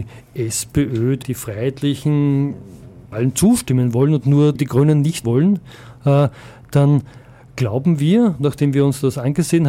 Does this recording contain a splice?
yes; 4 cuts; at 1.2 s, 3.1 s, 4.6 s, 5.2 s

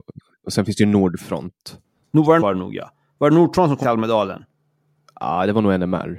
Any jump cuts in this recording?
yes; 2 cuts; at 2.4 s, 3.8 s

